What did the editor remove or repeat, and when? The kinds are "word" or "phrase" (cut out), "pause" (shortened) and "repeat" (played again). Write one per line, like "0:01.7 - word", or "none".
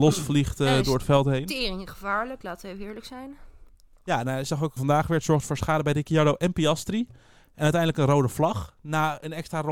0:04.8 - word